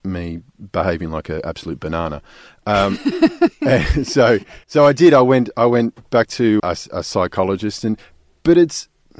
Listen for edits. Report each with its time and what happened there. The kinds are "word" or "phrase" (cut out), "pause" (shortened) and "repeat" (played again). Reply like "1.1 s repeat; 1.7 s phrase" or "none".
4.6 s pause; 6.6 s word